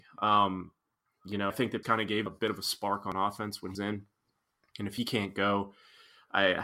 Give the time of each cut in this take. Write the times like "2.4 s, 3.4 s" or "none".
1.5 s, 1.8 s, 2.3 s, 3.7 s